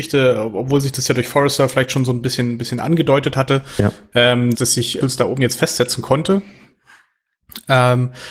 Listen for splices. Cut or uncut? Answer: cut